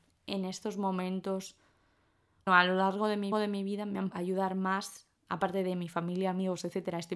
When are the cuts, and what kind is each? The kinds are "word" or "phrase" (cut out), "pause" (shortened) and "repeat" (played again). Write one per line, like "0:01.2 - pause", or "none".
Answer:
0:02.5 - word
0:03.3 - repeat
0:04.1 - word